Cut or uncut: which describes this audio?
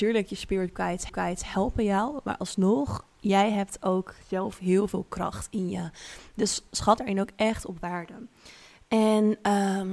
cut